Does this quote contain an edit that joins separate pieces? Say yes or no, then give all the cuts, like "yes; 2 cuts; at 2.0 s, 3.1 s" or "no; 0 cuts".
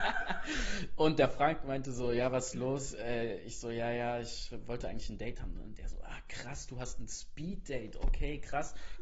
no; 0 cuts